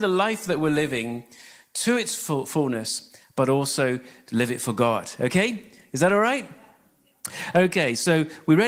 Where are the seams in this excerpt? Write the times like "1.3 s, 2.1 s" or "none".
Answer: none